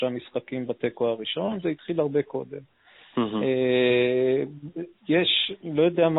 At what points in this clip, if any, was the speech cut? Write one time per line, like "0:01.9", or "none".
none